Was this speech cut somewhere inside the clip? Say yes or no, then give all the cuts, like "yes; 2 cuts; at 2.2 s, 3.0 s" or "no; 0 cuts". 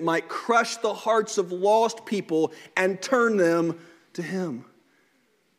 no; 0 cuts